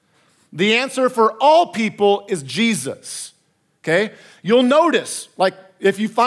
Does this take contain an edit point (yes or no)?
no